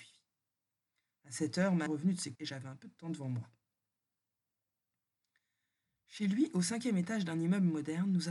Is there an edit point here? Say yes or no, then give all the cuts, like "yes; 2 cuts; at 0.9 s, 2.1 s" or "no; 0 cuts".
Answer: yes; 2 cuts; at 1.9 s, 2.3 s